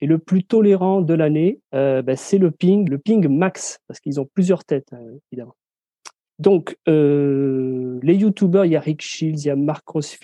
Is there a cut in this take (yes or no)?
yes